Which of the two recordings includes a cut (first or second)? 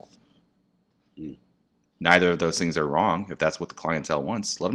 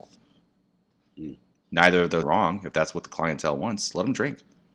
second